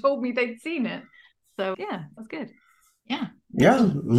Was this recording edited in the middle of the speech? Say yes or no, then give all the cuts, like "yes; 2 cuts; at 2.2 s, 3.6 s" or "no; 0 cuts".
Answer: yes; 2 cuts; at 1.7 s, 2.2 s